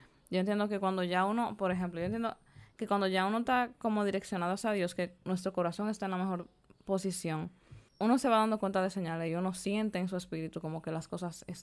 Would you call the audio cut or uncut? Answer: cut